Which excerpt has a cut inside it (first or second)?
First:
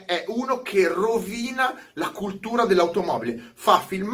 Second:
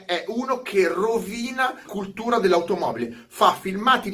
second